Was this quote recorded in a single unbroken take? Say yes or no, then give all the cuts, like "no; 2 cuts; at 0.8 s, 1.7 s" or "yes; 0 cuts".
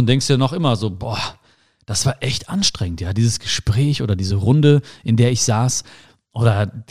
yes; 0 cuts